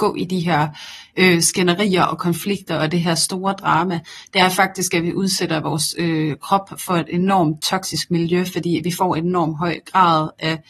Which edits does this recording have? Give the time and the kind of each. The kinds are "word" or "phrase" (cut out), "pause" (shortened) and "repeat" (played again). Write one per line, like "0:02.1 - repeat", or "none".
none